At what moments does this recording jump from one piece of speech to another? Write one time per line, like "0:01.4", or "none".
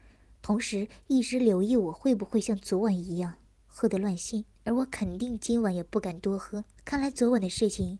0:04.5
0:06.8